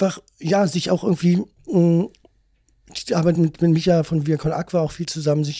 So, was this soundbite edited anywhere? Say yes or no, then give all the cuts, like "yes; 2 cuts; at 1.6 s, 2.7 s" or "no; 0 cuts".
no; 0 cuts